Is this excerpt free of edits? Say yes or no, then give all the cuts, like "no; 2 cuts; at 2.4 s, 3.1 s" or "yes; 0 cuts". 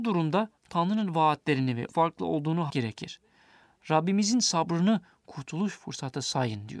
no; 2 cuts; at 1.9 s, 2.7 s